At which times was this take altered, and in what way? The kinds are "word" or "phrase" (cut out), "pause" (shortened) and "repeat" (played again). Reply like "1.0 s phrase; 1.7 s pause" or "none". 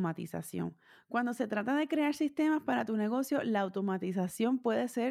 none